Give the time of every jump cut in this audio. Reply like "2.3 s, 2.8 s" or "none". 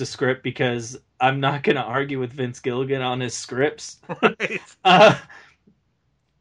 none